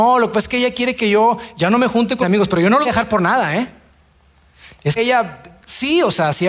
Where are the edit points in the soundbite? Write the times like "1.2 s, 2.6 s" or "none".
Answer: 2.2 s, 2.8 s, 5.0 s